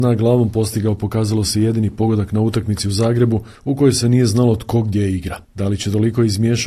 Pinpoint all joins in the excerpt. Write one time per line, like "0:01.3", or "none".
none